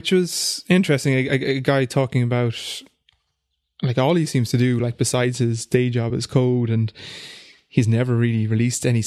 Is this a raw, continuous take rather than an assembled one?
yes; 0 cuts

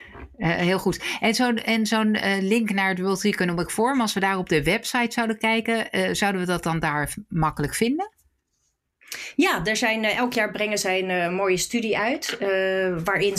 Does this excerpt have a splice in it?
no; 0 cuts

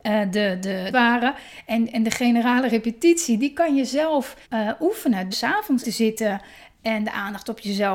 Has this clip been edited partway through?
yes; 4 cuts; at 0.9 s, 4.4 s, 5.3 s, 5.8 s

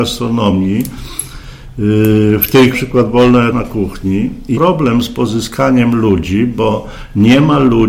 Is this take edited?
yes; 3 cuts; at 2.7 s, 3.5 s, 4.5 s

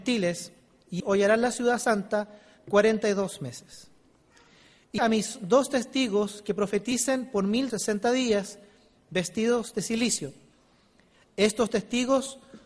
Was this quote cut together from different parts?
yes; 3 cuts; at 1.0 s, 5.0 s, 7.7 s

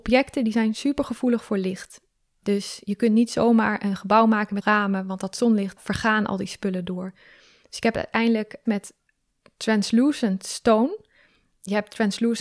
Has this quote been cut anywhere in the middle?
yes; 3 cuts; at 4.6 s, 5.8 s, 8.7 s

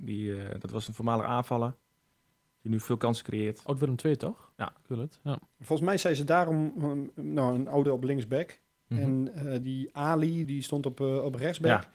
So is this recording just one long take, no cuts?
no; 6 cuts; at 2.8 s, 4.5 s, 5.5 s, 7.9 s, 9.6 s, 10.4 s

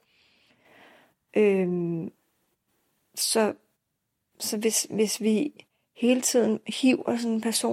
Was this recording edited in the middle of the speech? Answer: no; 0 cuts

